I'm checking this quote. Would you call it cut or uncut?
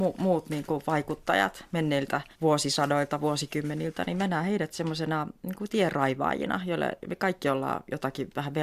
cut